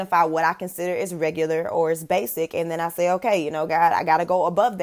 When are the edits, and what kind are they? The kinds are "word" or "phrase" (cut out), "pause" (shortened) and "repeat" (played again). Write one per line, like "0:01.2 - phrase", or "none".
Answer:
none

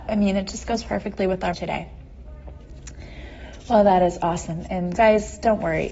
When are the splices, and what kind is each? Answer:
0:01.5 - word
0:05.0 - word

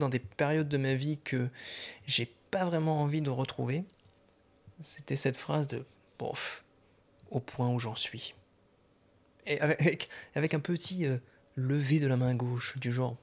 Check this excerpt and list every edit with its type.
none

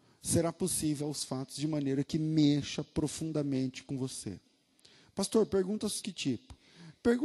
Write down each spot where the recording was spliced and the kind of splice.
0:01.0 - word
0:06.0 - word

